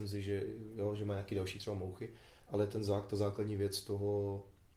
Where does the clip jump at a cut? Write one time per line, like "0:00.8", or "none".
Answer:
none